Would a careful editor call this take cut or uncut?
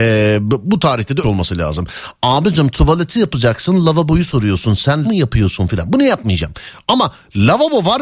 cut